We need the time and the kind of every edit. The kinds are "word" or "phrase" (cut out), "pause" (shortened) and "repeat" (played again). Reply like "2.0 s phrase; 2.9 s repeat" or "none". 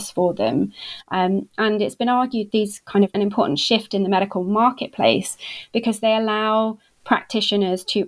2.5 s word; 3.1 s phrase